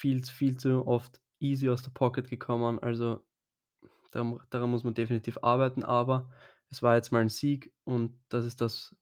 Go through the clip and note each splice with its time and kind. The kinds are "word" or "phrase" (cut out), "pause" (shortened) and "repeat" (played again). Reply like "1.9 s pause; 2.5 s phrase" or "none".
none